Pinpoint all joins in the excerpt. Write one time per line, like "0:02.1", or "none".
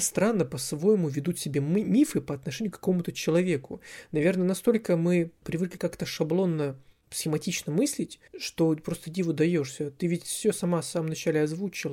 0:05.4
0:08.3